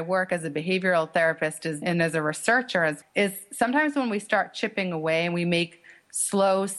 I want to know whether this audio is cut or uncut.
cut